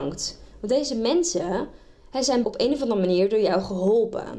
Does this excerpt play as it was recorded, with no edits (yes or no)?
no